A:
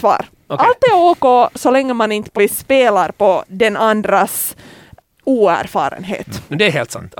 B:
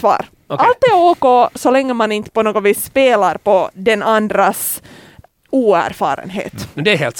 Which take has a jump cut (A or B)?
A